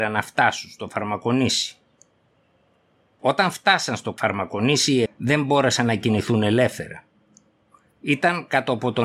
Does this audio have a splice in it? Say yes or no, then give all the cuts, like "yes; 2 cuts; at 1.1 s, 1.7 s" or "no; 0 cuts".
yes; 1 cut; at 5.1 s